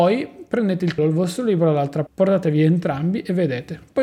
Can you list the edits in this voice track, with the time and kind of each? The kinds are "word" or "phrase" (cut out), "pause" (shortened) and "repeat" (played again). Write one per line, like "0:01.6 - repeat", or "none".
0:01.0 - word
0:02.1 - word